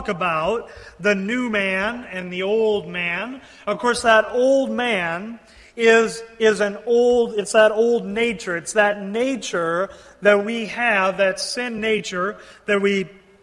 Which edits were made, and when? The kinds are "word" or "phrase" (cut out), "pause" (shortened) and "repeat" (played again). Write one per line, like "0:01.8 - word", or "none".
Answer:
none